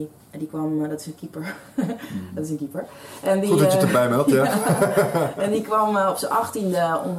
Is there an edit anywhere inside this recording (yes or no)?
no